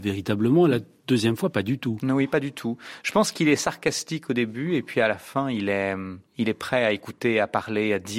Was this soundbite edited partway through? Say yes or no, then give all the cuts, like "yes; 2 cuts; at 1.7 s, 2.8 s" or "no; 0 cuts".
yes; 1 cut; at 6.3 s